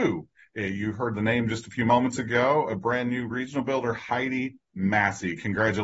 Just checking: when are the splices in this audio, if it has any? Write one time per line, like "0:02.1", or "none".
none